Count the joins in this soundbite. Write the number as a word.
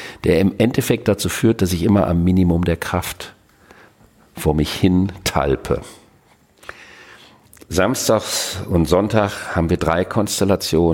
zero